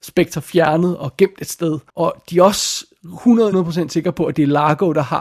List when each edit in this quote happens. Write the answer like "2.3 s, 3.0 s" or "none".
1.9 s, 3.5 s